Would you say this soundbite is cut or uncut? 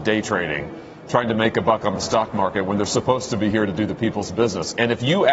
uncut